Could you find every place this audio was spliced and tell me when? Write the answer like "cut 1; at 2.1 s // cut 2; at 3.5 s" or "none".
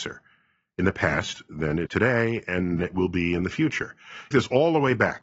cut 1; at 1.9 s // cut 2; at 2.8 s // cut 3; at 4.3 s